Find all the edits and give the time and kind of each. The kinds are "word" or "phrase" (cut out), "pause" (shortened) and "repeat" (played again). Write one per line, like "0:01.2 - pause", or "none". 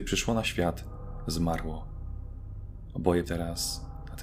0:03.2 - word